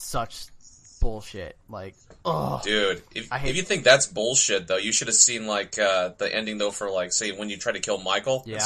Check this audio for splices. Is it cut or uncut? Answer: cut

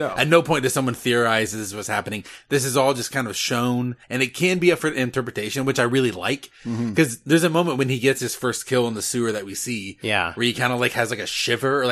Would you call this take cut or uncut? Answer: cut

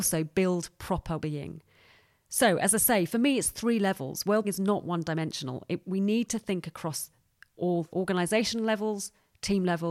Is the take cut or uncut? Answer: cut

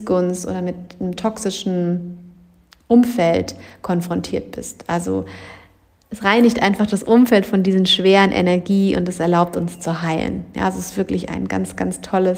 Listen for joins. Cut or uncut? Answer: uncut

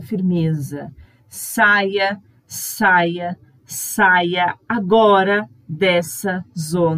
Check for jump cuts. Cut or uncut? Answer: uncut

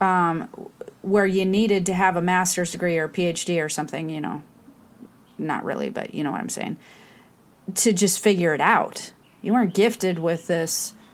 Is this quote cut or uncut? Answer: uncut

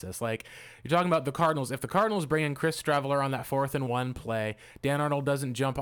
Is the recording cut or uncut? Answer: uncut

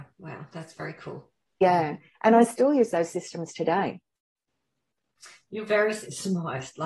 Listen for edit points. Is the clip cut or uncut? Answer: uncut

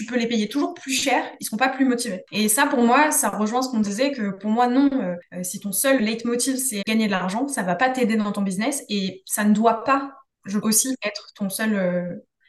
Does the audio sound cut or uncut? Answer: cut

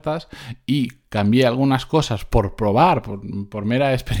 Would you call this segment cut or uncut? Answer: uncut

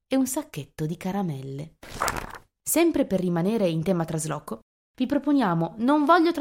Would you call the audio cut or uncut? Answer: uncut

